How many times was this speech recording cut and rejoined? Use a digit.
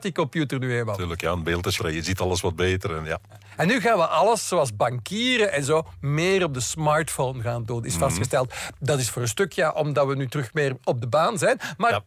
1